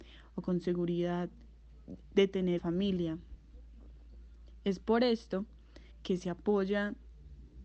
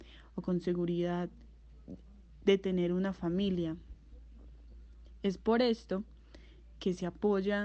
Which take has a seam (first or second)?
first